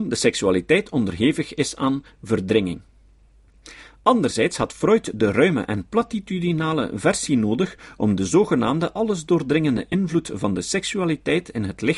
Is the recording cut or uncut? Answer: uncut